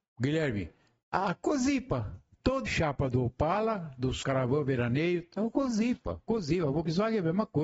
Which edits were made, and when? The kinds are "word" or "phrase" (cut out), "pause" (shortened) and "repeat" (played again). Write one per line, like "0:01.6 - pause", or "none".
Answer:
0:02.7 - word
0:04.2 - word
0:05.4 - word